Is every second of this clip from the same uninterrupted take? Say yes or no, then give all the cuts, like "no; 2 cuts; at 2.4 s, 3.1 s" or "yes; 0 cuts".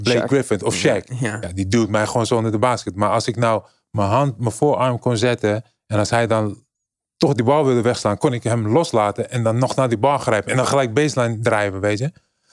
no; 1 cut; at 6.7 s